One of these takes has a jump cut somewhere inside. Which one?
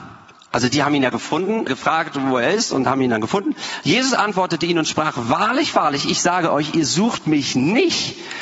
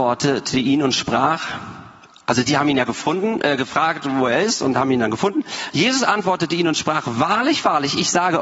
first; 1 cut; at 1.7 s

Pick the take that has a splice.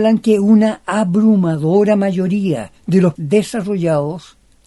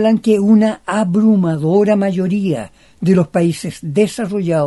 first; 2 cuts; at 2.8 s, 3.2 s

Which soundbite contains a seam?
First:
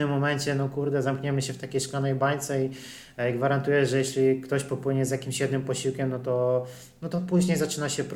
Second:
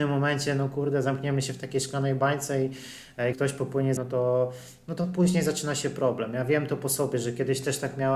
second; 2 cuts; at 3.3 s, 4.0 s

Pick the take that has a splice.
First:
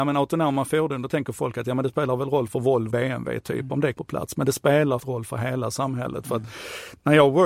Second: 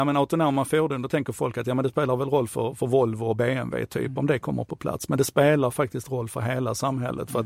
first; 4 cuts; at 2.5 s, 2.9 s, 3.9 s, 5.0 s

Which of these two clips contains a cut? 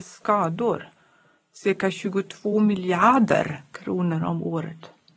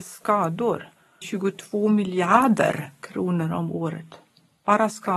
second; 1 cut; at 1.2 s

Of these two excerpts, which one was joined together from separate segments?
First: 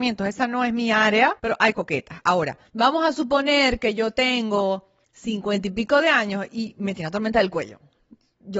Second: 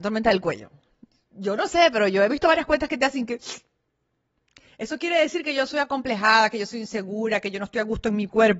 first; 4 cuts; at 1.4 s, 1.7 s, 2.7 s, 5.0 s

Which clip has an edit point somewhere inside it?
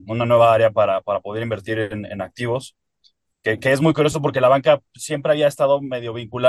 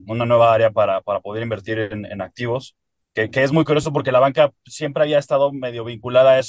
second; 1 cut; at 2.9 s

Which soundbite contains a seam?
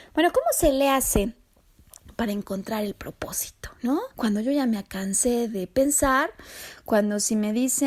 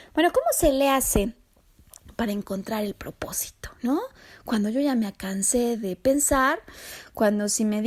first; 1 cut; at 4.1 s

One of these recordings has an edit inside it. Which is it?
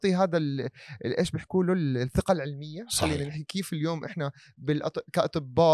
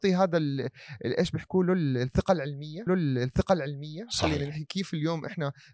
second; 1 cut; at 2.9 s

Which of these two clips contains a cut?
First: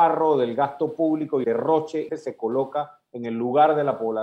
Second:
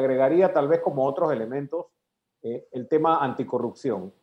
first; 2 cuts; at 1.4 s, 2.1 s

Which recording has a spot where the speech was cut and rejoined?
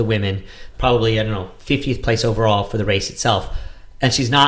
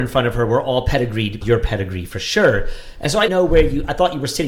second; 2 cuts; at 1.4 s, 3.3 s

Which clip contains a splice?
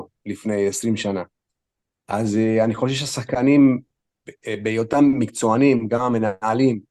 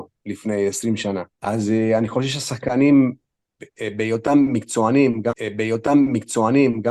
second; 2 cuts; at 1.3 s, 5.3 s

